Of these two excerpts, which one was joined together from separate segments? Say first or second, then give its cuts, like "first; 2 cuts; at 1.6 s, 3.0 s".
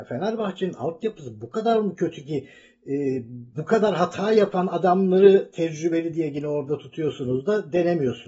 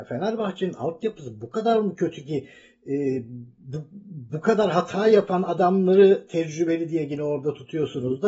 first; 1 cut; at 3.5 s